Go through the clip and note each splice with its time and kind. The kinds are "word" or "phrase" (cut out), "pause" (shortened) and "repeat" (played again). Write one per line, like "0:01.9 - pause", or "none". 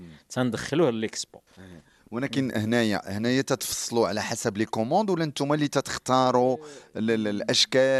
0:01.5 - pause